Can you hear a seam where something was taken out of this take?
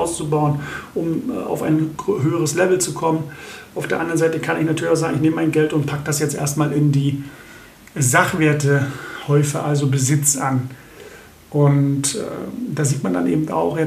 no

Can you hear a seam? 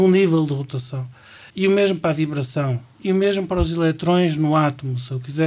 yes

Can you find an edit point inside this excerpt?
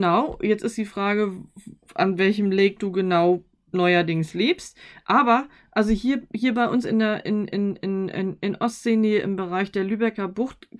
no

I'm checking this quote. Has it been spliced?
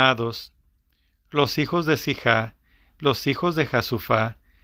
no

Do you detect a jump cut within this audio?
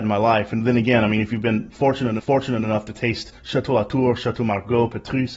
yes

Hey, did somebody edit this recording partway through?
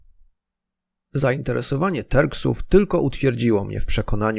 no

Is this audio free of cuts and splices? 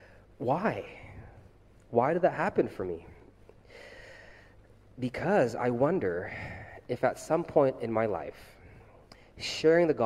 yes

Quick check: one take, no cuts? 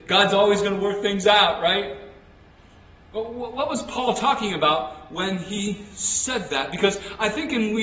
yes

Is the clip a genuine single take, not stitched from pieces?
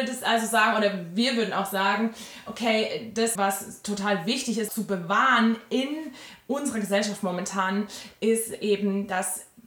no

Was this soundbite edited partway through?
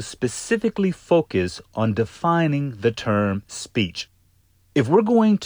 no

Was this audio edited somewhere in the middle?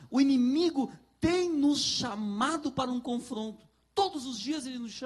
no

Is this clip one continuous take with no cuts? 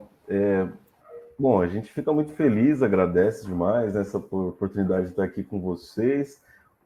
yes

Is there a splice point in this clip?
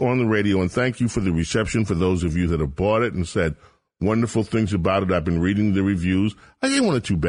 no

